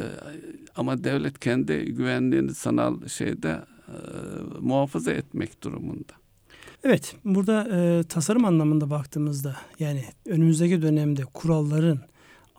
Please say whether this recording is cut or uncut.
cut